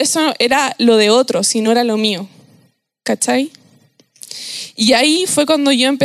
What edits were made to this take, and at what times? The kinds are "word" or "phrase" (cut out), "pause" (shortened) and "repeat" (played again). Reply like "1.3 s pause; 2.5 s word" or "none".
none